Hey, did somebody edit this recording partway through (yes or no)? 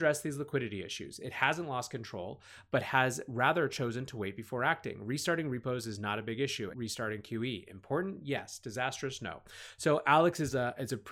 yes